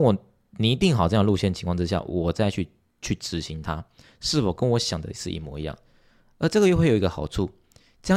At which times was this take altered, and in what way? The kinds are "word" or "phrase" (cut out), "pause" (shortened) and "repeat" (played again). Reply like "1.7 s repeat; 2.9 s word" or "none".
none